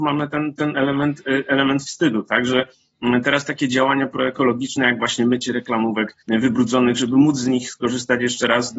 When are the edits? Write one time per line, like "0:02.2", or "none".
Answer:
0:06.2